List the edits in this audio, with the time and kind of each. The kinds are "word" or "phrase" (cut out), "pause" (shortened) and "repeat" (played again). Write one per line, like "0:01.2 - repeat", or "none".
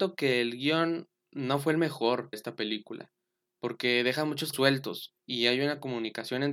0:02.3 - word
0:04.5 - word
0:05.2 - pause